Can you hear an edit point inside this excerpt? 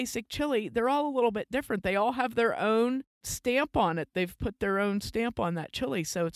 no; 0 cuts

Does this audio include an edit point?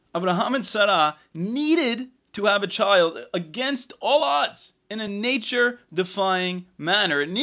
no; 0 cuts

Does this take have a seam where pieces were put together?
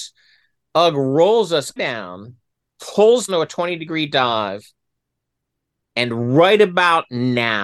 yes; 2 cuts; at 1.8 s, 3.3 s

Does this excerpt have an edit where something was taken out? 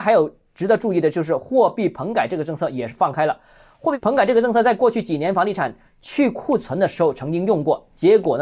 no; 0 cuts

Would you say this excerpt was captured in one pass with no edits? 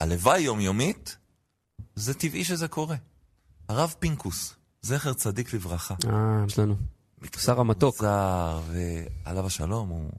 no; 1 cut; at 6.5 s

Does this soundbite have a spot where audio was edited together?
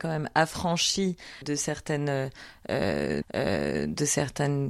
yes; 2 cuts; at 1.4 s, 3.2 s

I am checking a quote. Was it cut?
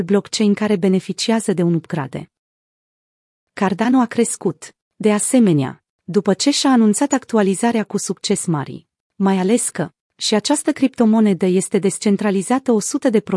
no; 0 cuts

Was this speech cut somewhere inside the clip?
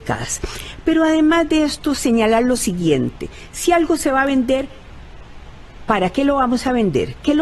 no; 0 cuts

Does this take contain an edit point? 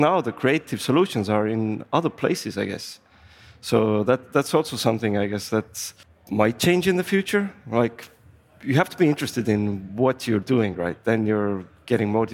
no; 0 cuts

